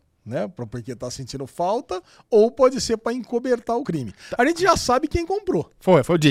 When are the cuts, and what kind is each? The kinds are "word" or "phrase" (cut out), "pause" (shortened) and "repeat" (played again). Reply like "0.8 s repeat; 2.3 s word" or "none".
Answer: none